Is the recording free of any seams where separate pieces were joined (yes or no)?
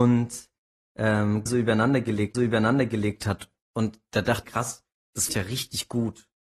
no